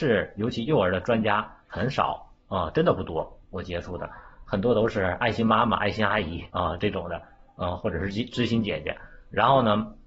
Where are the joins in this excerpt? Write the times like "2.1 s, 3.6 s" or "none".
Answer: 6.5 s